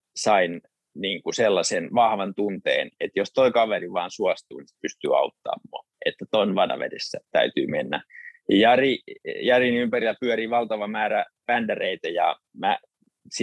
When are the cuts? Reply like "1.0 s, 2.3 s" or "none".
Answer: none